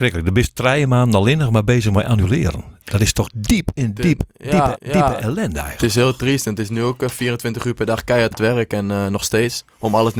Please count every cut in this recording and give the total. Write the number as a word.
two